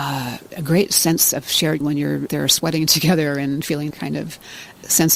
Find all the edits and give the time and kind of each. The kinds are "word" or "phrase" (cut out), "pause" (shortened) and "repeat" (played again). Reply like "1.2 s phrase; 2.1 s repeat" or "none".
1.8 s word; 2.3 s word; 3.9 s word